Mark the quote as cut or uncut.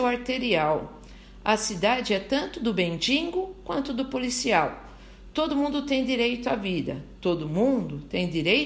uncut